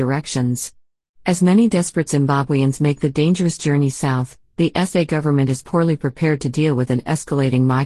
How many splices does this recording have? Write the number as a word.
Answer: zero